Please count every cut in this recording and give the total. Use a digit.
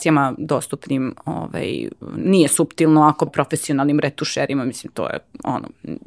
2